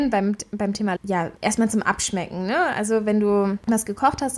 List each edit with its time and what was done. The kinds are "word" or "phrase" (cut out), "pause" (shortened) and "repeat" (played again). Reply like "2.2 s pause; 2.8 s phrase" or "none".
1.0 s word